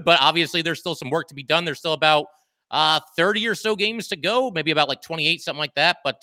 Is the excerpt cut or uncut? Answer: uncut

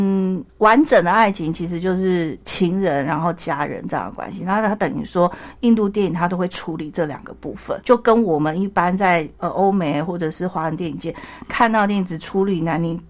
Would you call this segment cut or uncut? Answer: cut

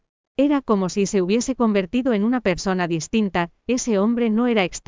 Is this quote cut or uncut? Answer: uncut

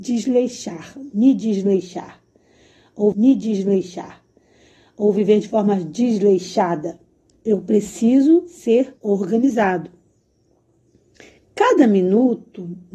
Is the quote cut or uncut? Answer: cut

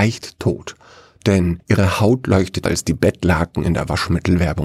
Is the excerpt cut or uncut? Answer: cut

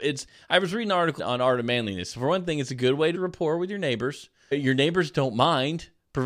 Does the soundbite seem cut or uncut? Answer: cut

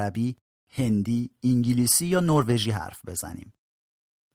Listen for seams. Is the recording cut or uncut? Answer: uncut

